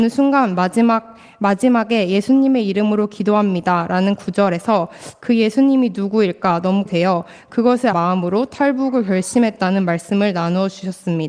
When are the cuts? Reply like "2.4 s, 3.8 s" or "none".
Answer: 6.9 s, 7.9 s